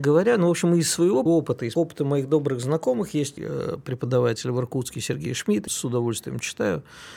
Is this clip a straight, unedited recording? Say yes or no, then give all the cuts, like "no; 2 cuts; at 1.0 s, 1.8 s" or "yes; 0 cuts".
no; 4 cuts; at 1.3 s, 1.8 s, 3.4 s, 5.7 s